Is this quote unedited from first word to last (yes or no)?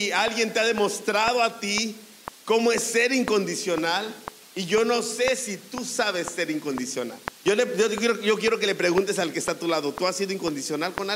no